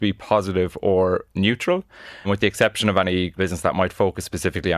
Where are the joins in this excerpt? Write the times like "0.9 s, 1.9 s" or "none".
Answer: 2.2 s, 3.4 s